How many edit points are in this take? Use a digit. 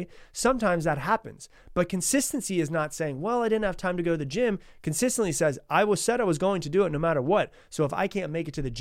0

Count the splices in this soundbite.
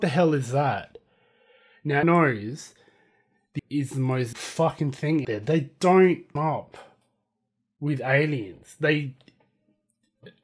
5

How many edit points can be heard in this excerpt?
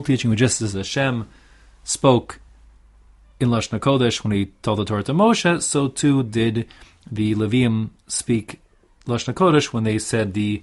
0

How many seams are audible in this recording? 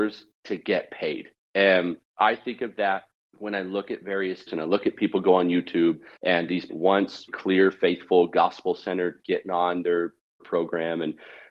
8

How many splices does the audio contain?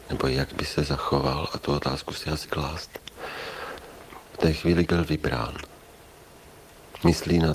3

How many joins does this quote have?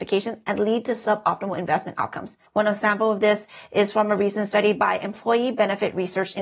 1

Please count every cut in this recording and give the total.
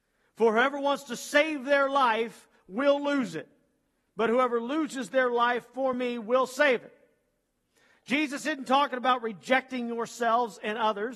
0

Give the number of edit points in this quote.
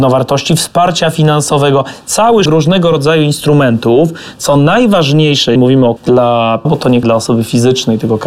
5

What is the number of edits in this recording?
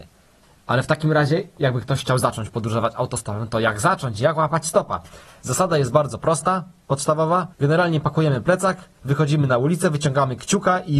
1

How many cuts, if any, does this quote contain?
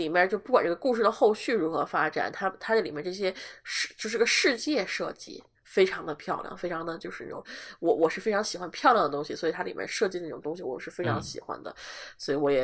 0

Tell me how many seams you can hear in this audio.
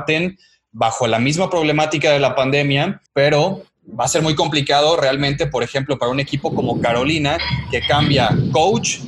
1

